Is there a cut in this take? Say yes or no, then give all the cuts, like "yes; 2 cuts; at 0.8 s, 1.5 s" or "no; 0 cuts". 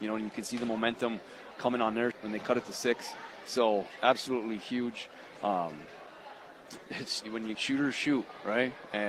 yes; 6 cuts; at 1.5 s, 2.1 s, 4.0 s, 6.8 s, 7.2 s, 7.5 s